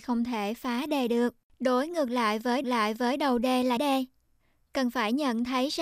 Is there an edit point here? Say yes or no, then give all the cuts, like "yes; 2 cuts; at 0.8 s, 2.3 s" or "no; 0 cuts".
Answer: yes; 3 cuts; at 1.5 s, 2.6 s, 3.8 s